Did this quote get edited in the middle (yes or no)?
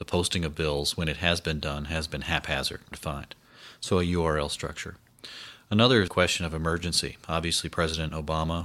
yes